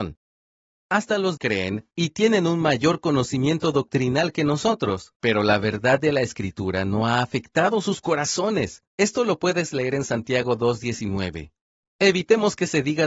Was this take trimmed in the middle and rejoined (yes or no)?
yes